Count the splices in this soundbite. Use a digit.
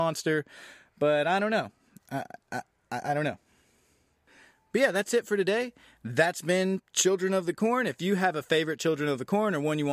0